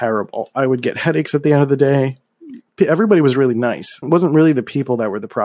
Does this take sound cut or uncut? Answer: cut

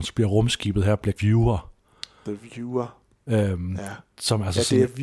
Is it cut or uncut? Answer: cut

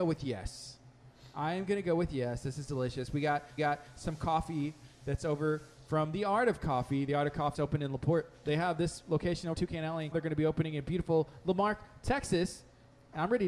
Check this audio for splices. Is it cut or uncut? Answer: cut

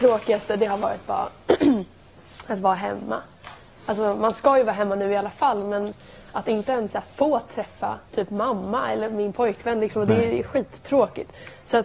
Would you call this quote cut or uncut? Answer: cut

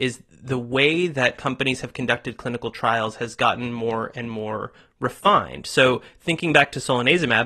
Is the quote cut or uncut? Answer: uncut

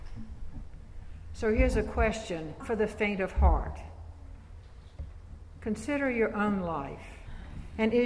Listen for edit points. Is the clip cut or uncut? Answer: cut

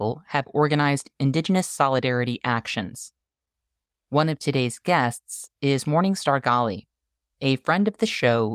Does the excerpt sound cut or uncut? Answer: uncut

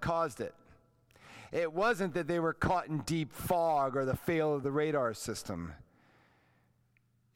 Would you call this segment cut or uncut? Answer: uncut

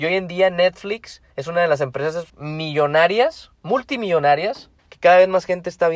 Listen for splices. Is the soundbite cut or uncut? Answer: cut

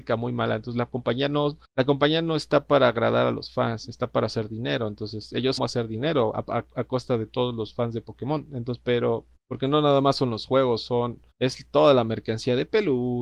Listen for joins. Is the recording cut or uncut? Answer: cut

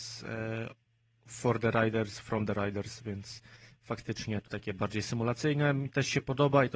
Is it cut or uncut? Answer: cut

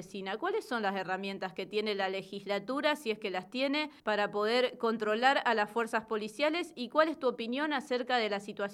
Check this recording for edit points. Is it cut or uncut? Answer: cut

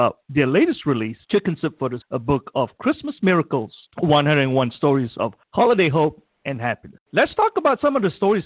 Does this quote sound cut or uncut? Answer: cut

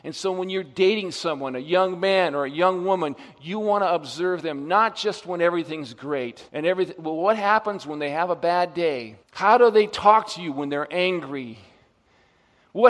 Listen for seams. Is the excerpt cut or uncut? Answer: cut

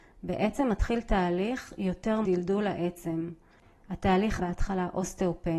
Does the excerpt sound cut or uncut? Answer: cut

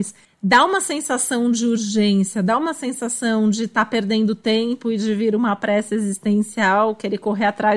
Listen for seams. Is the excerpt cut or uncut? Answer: uncut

